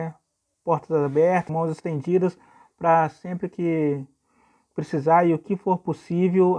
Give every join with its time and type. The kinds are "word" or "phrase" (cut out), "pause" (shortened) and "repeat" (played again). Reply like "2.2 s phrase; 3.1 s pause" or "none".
1.5 s word